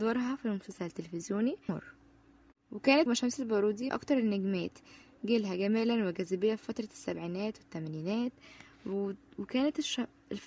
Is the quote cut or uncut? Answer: cut